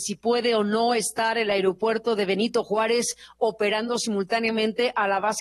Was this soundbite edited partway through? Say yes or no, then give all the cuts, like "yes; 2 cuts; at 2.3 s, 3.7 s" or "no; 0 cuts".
no; 0 cuts